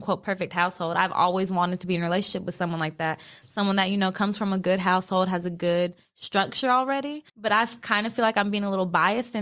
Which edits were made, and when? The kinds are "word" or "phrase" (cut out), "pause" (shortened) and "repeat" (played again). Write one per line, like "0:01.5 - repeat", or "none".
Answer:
0:07.3 - pause